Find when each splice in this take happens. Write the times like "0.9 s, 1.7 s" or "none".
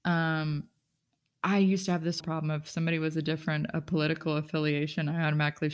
2.2 s